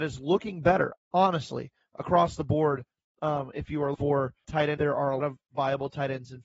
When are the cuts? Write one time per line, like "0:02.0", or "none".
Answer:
0:01.0
0:03.9
0:04.4
0:04.8
0:05.2